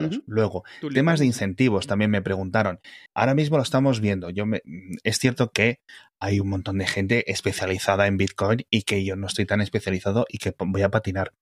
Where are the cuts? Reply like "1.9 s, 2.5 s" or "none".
3.1 s